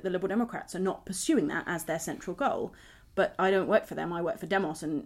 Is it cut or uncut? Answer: uncut